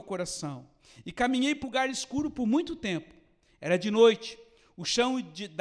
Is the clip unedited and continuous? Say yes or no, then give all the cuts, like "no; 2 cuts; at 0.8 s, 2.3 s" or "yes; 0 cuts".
no; 1 cut; at 1.6 s